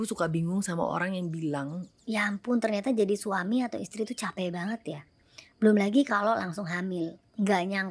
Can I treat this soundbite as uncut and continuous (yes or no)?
yes